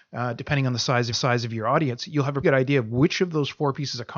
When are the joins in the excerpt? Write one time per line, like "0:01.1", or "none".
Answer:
0:01.1
0:02.4